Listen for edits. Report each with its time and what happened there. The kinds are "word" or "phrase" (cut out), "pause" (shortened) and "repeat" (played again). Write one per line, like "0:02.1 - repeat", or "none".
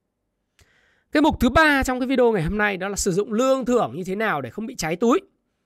none